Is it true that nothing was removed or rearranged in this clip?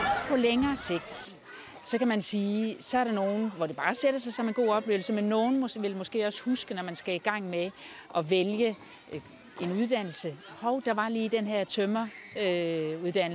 yes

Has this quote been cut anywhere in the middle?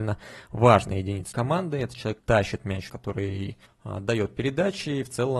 yes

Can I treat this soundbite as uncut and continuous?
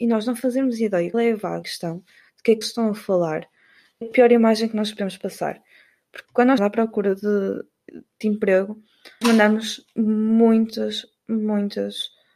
no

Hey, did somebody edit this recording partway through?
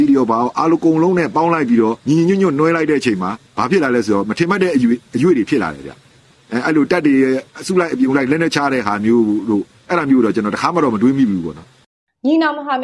yes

